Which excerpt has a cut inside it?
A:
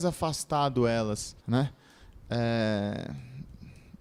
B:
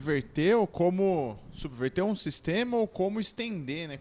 A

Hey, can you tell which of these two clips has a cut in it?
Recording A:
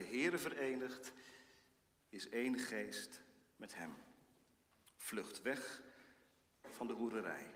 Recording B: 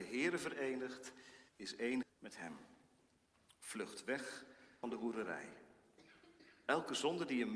B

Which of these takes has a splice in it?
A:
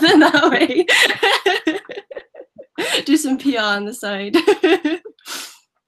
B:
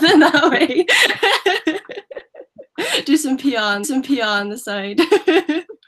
B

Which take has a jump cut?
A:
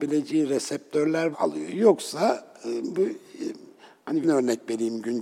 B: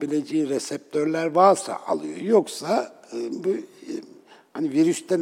A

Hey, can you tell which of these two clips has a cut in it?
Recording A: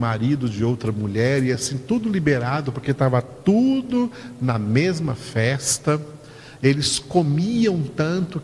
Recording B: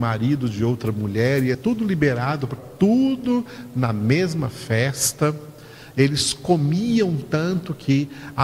B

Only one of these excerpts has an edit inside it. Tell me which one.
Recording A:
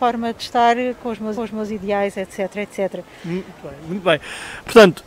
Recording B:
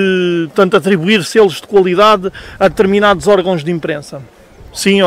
A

